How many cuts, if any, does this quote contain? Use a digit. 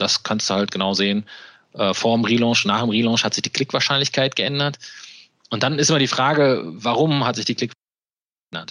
0